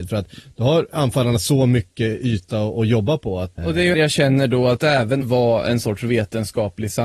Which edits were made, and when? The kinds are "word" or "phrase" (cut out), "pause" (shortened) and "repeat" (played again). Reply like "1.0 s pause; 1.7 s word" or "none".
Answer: 3.6 s word; 3.9 s word; 5.2 s phrase